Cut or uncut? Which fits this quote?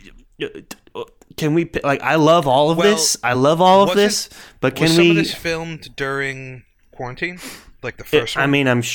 uncut